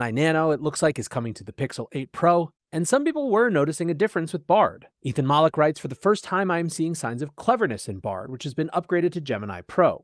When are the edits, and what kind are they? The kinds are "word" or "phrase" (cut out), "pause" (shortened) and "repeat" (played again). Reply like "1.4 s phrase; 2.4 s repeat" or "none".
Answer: 4.9 s pause